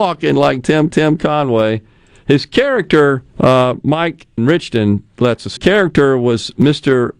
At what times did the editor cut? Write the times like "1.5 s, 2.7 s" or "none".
0.9 s, 3.3 s, 4.4 s, 5.6 s